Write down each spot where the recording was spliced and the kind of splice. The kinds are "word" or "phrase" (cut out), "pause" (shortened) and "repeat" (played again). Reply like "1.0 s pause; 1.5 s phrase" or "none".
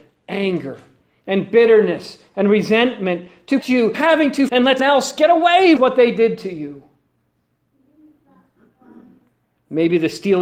3.6 s word; 3.9 s word; 4.5 s word; 4.8 s word; 5.8 s word